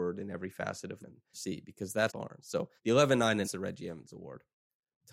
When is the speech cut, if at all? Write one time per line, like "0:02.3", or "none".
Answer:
0:01.0
0:01.3
0:02.1
0:02.8
0:03.4